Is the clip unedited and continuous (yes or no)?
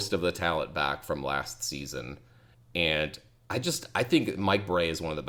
yes